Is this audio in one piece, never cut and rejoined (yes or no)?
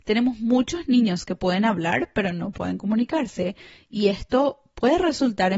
yes